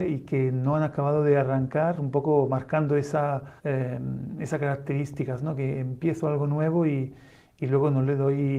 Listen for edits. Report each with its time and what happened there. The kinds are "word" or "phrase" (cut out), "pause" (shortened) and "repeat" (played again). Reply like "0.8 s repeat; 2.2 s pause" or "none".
3.6 s pause